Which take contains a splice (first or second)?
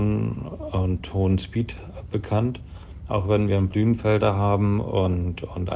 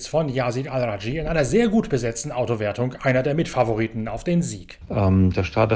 first